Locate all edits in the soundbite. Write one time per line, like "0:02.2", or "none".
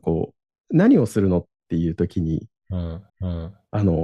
0:03.1